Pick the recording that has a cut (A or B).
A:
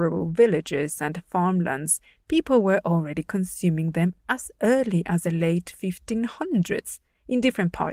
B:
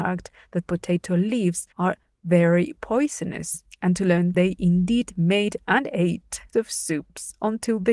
B